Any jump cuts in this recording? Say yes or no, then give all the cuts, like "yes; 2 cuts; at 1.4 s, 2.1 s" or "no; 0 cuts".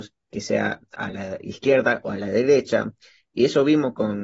no; 0 cuts